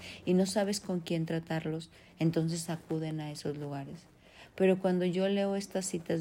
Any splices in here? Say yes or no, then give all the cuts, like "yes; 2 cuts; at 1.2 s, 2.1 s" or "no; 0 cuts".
no; 0 cuts